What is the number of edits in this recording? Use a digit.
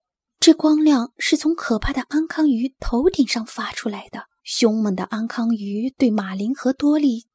1